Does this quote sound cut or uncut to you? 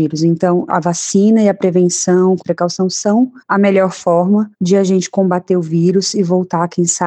cut